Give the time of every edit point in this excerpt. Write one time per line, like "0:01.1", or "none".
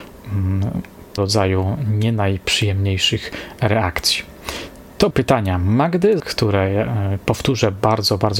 0:01.2
0:05.1
0:06.2